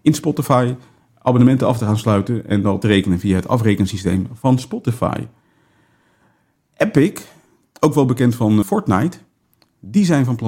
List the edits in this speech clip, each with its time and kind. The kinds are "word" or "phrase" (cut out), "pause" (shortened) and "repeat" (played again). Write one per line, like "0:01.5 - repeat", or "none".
0:02.8 - word
0:08.6 - word

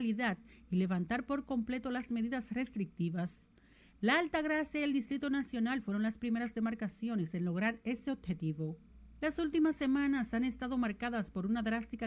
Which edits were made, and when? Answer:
none

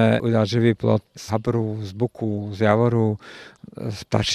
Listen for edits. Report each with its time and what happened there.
0:01.1 - word

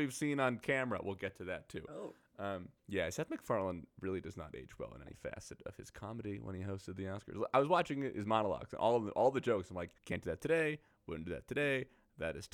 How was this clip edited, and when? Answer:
0:02.8 - pause
0:10.0 - pause

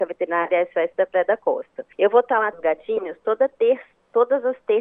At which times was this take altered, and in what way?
0:01.9 - pause
0:02.5 - word

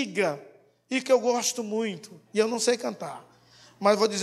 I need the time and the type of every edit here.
none

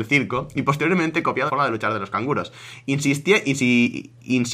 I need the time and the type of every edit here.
0:01.5 - word

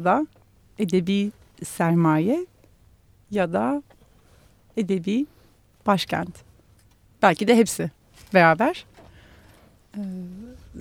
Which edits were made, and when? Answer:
none

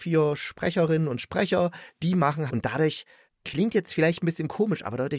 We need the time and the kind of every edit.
0:02.5 - phrase

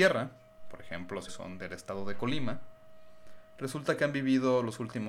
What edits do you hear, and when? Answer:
0:01.3 - word

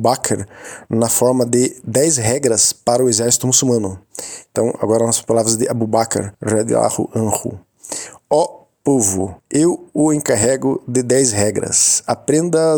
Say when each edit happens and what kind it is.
0:06.3 - pause
0:09.4 - pause

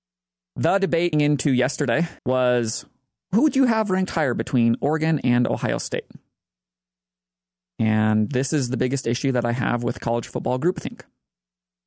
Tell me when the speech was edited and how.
0:01.1 - word
0:02.2 - pause

